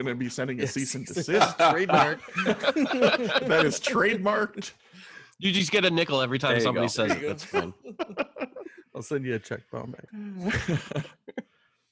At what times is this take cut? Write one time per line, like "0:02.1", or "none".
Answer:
0:10.1